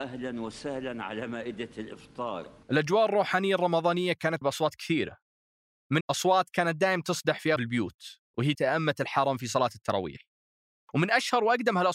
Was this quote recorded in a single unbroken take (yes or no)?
no